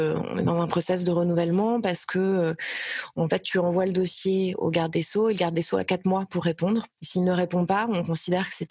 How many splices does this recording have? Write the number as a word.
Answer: one